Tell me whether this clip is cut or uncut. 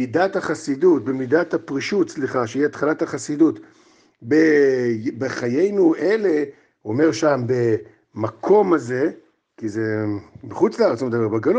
uncut